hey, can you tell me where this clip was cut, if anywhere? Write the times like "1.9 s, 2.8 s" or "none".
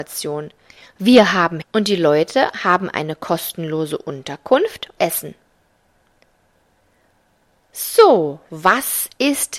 1.6 s, 5.0 s